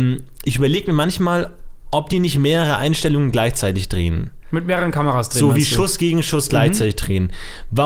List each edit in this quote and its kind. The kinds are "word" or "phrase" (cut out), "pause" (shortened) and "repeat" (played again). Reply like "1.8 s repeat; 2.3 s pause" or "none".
none